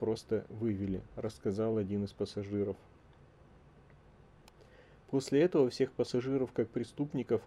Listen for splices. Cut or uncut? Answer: uncut